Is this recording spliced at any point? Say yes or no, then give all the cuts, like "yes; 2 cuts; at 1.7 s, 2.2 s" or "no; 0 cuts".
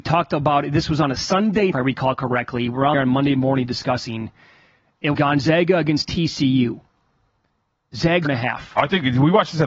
yes; 4 cuts; at 1.7 s, 2.9 s, 5.1 s, 8.2 s